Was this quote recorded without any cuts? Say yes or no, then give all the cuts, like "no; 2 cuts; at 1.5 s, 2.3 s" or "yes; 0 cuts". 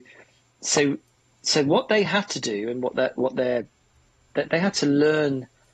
yes; 0 cuts